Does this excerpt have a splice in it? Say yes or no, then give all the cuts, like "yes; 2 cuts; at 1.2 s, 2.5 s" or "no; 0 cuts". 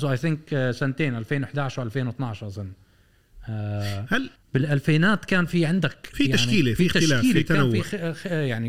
yes; 1 cut; at 4.4 s